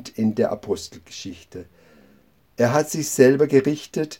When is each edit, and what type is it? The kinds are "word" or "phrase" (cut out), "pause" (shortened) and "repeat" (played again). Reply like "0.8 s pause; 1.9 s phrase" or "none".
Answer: none